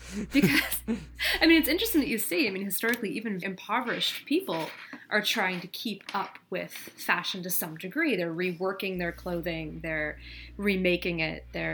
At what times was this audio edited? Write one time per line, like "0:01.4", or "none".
0:03.4